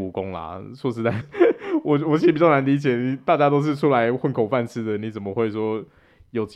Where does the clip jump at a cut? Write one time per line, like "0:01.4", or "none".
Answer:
0:01.2